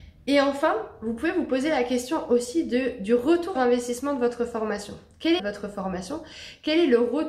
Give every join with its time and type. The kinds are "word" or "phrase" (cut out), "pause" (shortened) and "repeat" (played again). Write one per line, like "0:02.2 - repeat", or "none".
0:03.6 - word
0:05.4 - phrase